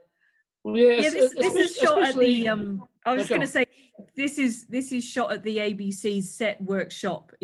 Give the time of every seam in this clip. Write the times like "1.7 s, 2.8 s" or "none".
3.0 s